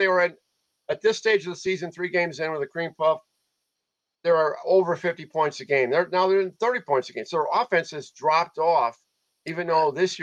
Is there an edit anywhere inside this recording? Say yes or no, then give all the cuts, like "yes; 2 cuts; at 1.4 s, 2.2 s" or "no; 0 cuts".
no; 0 cuts